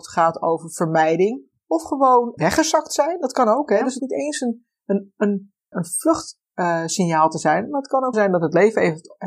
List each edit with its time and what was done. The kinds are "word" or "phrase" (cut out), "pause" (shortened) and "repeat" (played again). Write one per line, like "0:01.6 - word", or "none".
0:02.4 - word
0:04.0 - word
0:05.7 - word
0:08.1 - word